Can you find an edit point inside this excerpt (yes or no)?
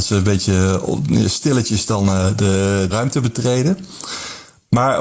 yes